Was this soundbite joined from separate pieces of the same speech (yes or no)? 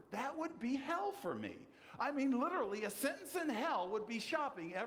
no